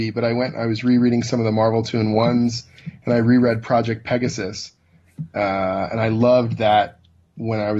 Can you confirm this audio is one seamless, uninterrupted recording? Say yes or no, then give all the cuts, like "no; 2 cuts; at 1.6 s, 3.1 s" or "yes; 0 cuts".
yes; 0 cuts